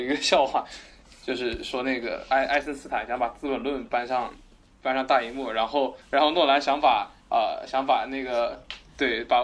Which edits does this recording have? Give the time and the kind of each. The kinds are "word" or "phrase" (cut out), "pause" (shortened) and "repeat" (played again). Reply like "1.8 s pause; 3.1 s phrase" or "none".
6.0 s pause; 7.2 s pause